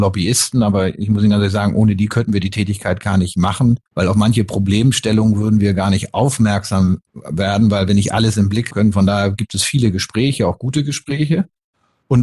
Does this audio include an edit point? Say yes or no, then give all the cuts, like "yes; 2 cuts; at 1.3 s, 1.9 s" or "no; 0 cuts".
yes; 3 cuts; at 3.9 s, 7.1 s, 8.7 s